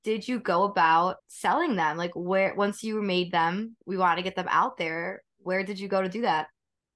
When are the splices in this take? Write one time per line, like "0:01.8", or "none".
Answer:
0:01.2
0:03.8